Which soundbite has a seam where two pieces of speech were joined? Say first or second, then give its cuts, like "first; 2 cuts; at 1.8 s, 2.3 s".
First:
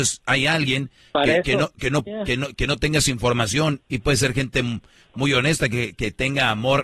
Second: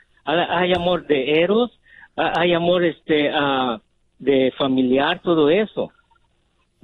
first; 1 cut; at 2.1 s